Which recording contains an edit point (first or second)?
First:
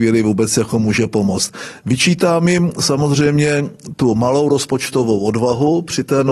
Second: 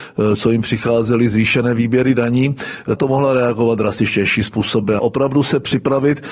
second